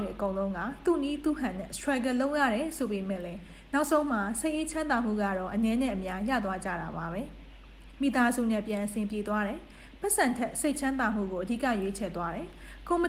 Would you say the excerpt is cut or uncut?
uncut